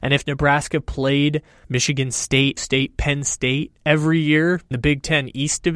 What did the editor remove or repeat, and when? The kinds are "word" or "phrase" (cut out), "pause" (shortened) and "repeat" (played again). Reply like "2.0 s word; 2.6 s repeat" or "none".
1.6 s word; 2.6 s word; 3.8 s pause; 4.7 s word